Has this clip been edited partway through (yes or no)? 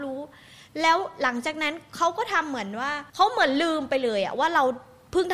yes